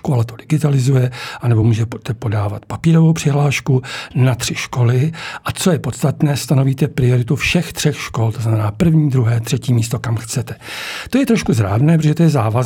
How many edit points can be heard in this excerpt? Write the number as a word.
zero